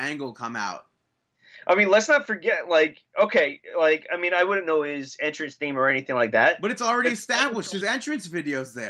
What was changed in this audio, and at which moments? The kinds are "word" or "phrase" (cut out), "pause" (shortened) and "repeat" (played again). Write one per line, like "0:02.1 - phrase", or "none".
none